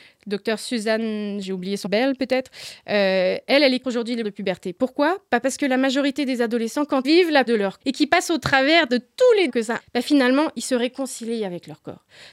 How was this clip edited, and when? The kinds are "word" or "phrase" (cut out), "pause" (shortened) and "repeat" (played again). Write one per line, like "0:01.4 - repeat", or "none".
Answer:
0:01.9 - word
0:03.8 - word
0:04.2 - word
0:07.0 - word
0:07.5 - word
0:07.8 - word
0:09.5 - word
0:09.8 - word